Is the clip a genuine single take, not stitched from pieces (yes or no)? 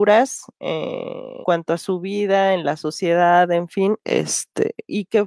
no